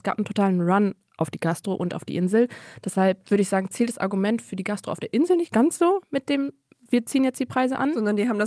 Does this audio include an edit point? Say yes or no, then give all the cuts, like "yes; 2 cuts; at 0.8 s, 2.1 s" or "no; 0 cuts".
no; 0 cuts